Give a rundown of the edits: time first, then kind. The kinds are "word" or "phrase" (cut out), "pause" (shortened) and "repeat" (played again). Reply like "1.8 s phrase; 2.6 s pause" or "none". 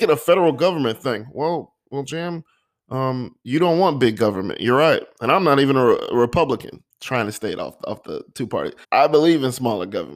3.4 s pause; 6.9 s pause; 8.8 s pause